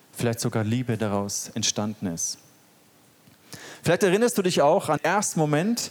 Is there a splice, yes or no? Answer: yes